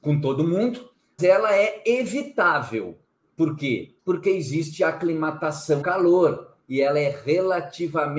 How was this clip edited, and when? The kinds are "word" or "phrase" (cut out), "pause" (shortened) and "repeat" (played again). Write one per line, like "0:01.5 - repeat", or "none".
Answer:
0:01.2 - word
0:03.1 - pause
0:04.0 - pause
0:05.8 - word

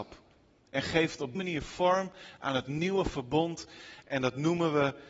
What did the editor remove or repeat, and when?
0:01.4 - word

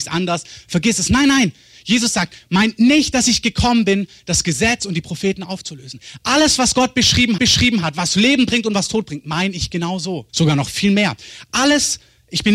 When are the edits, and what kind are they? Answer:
0:07.4 - repeat
0:10.3 - pause

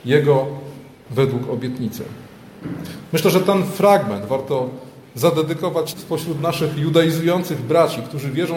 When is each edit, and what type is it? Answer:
0:01.1 - word
0:05.9 - word

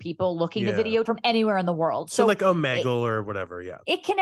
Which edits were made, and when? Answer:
0:01.0 - word

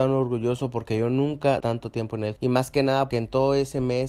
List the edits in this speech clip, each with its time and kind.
0:01.6 - word
0:02.4 - word
0:03.1 - word

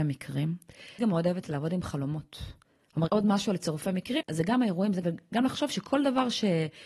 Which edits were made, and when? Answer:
0:01.0 - word
0:03.1 - word
0:04.2 - word
0:05.0 - word

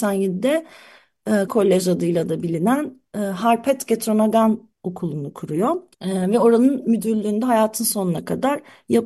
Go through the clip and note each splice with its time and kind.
0:01.5 - word
0:04.7 - pause
0:05.9 - pause

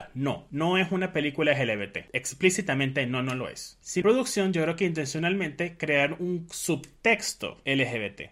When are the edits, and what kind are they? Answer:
0:04.0 - phrase

